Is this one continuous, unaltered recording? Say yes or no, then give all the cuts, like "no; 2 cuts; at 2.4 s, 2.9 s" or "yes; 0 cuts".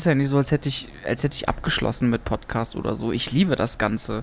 yes; 0 cuts